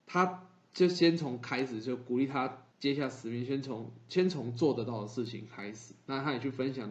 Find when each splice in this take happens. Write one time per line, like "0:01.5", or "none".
0:02.7

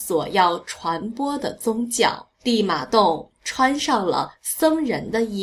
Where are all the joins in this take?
0:02.3

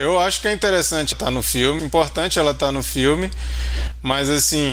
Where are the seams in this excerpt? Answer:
0:01.1
0:01.8

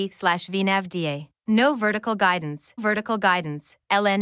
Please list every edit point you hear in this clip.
0:01.4
0:02.8

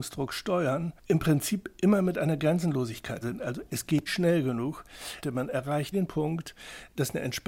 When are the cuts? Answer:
0:03.2
0:04.1
0:05.9

